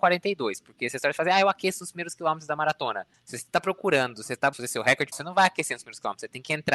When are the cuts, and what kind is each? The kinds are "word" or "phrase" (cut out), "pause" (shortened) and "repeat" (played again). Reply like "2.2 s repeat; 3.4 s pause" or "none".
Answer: 4.5 s word; 5.1 s word